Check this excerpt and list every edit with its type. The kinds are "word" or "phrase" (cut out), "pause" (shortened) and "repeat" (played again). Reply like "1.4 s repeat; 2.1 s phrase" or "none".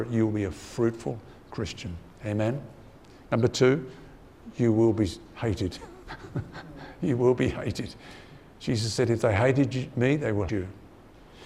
10.5 s word